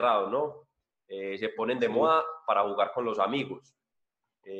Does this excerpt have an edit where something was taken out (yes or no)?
no